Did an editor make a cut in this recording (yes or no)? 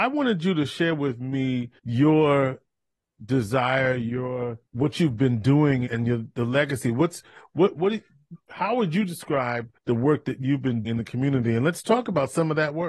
yes